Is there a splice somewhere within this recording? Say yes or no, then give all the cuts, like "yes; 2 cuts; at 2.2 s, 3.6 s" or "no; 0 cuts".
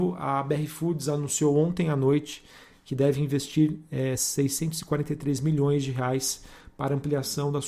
no; 0 cuts